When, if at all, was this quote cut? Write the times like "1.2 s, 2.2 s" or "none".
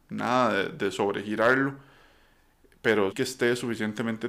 3.1 s